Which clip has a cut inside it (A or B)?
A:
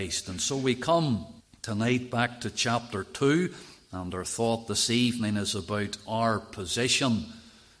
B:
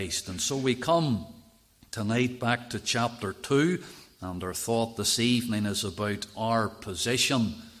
A